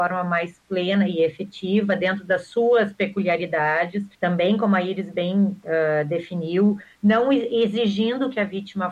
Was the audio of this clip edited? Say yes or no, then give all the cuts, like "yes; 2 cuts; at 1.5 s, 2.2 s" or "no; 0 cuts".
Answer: yes; 1 cut; at 4.1 s